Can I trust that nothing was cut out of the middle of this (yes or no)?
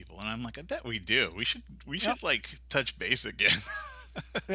yes